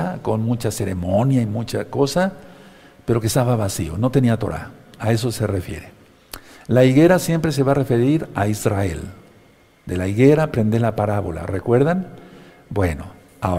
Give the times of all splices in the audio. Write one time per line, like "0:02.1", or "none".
none